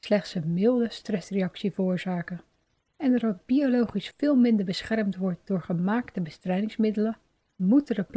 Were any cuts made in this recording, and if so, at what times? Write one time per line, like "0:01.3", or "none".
0:04.1